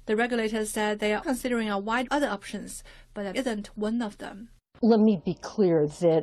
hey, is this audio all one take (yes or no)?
no